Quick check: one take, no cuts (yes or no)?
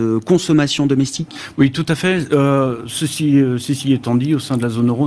yes